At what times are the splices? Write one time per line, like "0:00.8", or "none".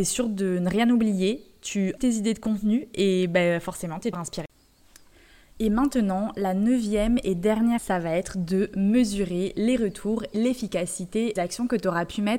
0:02.0
0:04.1
0:07.8
0:10.3
0:11.4

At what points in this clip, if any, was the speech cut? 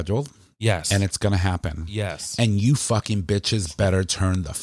none

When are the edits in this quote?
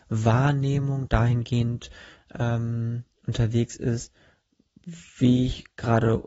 0:05.1

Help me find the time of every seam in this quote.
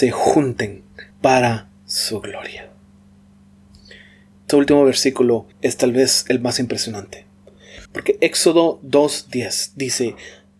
0:01.1
0:04.5
0:05.5
0:07.9

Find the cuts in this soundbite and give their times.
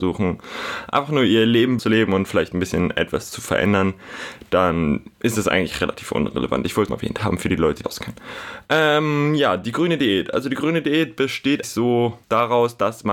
0:01.8
0:05.1
0:06.9
0:07.8
0:11.6
0:12.2

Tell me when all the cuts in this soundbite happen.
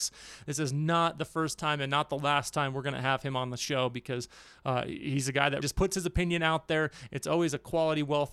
0:05.6

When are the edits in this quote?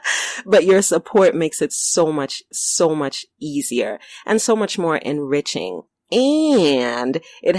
0:02.5
0:05.9

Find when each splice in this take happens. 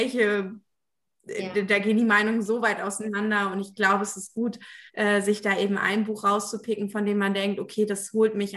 0:04.9

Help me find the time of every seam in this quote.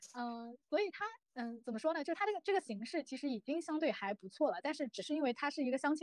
0:01.2

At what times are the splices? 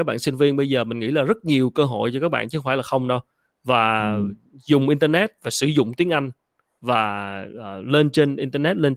none

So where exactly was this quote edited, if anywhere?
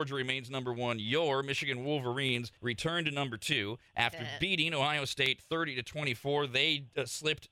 0:02.6
0:03.9

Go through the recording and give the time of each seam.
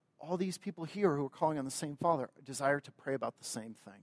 none

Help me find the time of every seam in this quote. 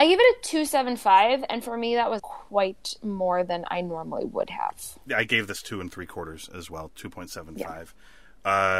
0:02.2

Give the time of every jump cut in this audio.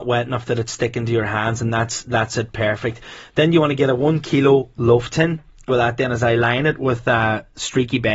0:05.7

